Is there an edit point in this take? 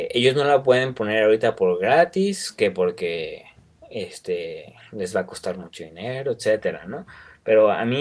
no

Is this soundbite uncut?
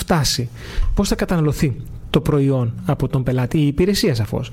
yes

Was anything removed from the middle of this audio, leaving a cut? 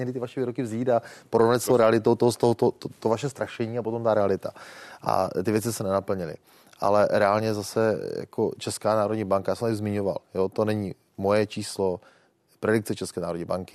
no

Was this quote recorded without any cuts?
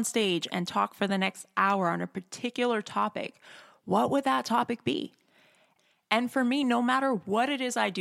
yes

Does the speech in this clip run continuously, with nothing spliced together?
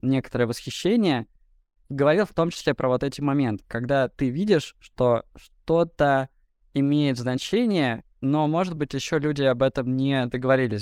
yes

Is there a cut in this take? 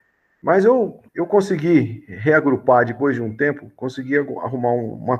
yes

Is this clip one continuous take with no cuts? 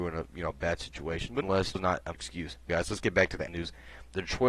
no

